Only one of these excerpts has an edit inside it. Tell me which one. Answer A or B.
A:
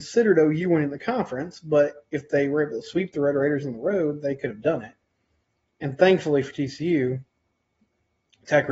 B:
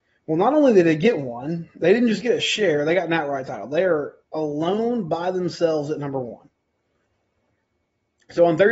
B